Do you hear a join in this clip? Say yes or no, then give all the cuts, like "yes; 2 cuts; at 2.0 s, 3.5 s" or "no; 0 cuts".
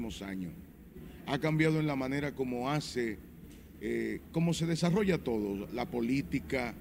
no; 0 cuts